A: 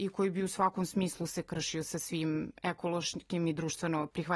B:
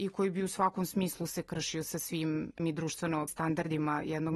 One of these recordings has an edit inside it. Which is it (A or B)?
B